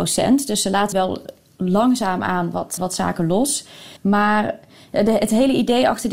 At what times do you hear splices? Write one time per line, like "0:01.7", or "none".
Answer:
0:00.9
0:02.8
0:04.0